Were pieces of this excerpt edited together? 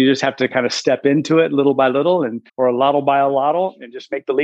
yes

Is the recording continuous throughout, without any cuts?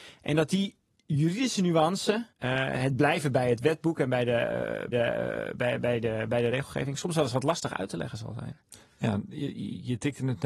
no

